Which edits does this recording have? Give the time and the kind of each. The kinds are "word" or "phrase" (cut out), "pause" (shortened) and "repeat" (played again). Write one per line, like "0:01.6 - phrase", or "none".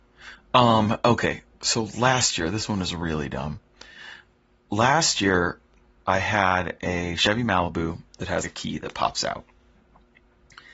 0:08.4 - word